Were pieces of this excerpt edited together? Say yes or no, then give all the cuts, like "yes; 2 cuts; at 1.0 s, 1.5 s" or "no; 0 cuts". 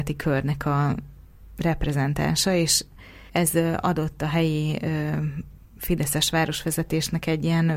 yes; 2 cuts; at 3.3 s, 5.7 s